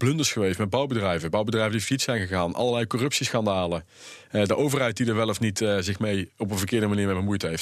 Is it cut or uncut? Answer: uncut